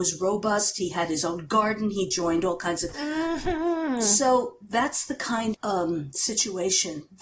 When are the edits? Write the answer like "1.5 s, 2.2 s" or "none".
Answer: 2.9 s, 5.5 s